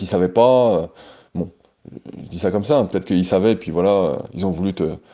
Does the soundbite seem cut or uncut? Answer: uncut